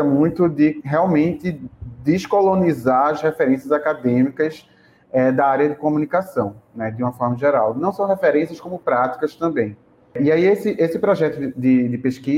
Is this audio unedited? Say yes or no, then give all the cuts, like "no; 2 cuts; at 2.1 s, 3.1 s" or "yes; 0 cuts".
yes; 0 cuts